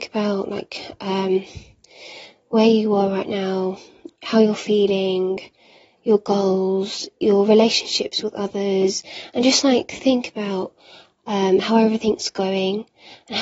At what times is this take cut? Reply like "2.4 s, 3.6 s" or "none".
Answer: none

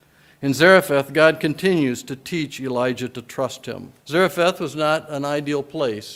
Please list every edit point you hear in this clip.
4.0 s

